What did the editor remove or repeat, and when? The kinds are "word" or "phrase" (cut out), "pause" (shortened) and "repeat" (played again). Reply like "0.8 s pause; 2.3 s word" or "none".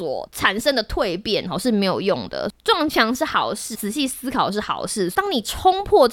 3.7 s word